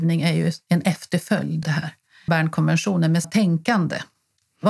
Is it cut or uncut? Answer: cut